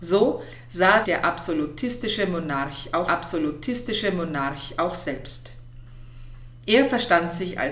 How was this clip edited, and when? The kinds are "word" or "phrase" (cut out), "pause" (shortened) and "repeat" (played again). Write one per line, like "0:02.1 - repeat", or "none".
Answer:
0:01.0 - word
0:03.1 - repeat